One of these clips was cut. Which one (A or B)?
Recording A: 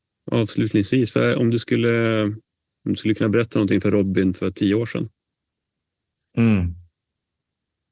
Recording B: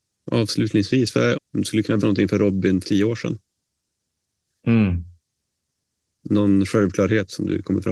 B